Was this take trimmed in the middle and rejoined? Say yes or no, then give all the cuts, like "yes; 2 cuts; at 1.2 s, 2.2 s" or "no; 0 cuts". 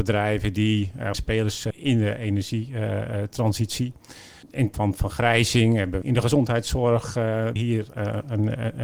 yes; 5 cuts; at 1.1 s, 1.7 s, 4.7 s, 6.0 s, 7.6 s